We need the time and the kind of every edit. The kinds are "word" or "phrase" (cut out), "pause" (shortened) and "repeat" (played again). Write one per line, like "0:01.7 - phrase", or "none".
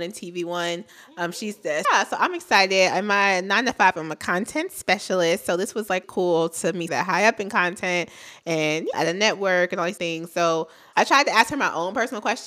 0:01.8 - word
0:06.0 - word
0:06.9 - word
0:08.9 - word
0:10.0 - word
0:10.9 - word